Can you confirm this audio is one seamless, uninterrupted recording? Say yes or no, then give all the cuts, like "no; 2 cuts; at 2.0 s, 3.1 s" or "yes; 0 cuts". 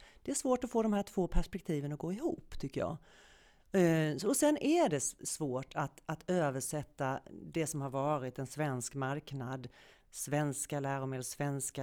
yes; 0 cuts